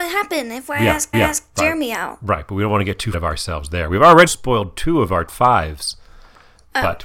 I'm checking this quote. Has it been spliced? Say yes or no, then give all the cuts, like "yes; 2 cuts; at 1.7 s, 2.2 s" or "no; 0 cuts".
yes; 4 cuts; at 1.1 s, 3.1 s, 4.3 s, 5.3 s